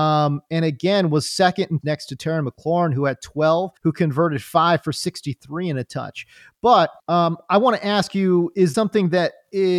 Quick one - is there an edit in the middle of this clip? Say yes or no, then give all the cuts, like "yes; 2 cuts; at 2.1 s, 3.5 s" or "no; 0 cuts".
yes; 4 cuts; at 1.8 s, 3.8 s, 7.0 s, 8.7 s